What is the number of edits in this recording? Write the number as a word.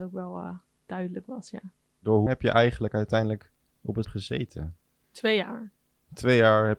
two